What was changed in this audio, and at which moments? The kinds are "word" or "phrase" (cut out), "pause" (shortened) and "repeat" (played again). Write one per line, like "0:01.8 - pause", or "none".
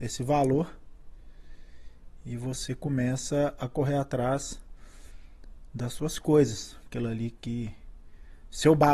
none